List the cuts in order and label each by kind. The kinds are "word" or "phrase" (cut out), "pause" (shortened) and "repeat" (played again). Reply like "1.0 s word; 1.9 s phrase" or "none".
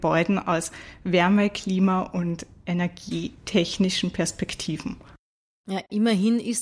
none

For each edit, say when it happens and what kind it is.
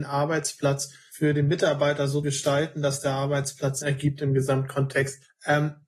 2.2 s word; 3.8 s word

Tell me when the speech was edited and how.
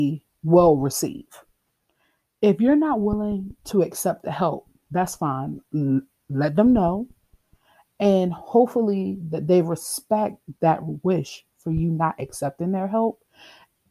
none

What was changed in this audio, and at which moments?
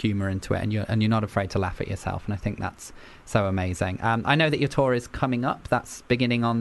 none

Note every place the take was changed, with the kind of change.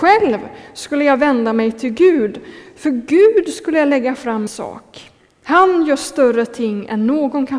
4.5 s word

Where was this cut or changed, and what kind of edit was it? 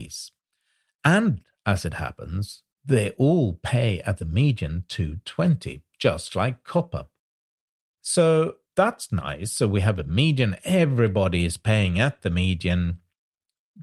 2.7 s pause; 8.7 s pause

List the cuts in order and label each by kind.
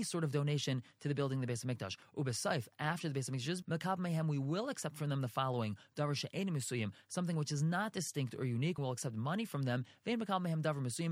3.6 s word; 8.8 s word

